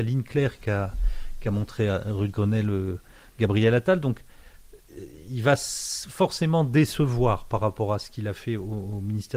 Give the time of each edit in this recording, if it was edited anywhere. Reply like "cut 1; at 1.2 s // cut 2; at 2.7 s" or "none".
none